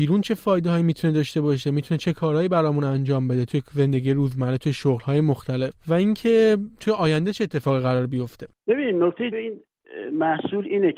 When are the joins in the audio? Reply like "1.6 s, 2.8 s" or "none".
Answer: 9.3 s